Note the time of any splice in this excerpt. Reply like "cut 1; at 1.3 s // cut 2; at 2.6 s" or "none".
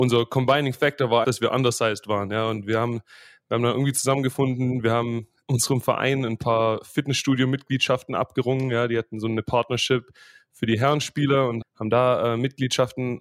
cut 1; at 1.2 s // cut 2; at 5.4 s // cut 3; at 11.6 s